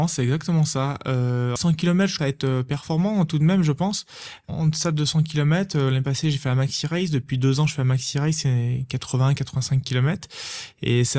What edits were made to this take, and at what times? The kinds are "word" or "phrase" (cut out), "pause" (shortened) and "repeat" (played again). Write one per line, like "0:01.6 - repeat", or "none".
0:01.6 - word
0:02.2 - word